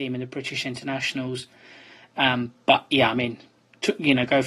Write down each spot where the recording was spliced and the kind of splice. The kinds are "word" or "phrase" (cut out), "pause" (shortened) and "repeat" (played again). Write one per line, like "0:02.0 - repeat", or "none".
none